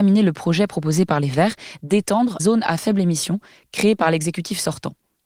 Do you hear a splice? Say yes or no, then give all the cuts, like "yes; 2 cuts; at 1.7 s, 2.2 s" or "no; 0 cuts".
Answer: yes; 1 cut; at 2.4 s